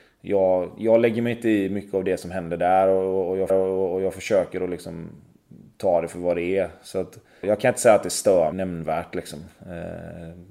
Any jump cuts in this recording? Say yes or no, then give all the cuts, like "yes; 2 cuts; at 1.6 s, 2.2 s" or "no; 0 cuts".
yes; 3 cuts; at 3.5 s, 7.4 s, 8.5 s